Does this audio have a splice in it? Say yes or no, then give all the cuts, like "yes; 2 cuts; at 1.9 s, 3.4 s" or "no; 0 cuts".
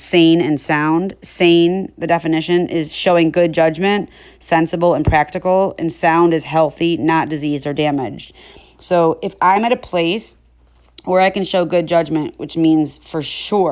no; 0 cuts